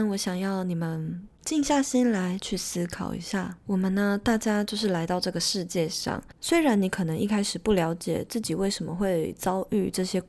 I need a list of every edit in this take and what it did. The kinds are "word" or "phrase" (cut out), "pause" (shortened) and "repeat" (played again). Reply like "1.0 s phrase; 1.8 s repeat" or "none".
3.6 s pause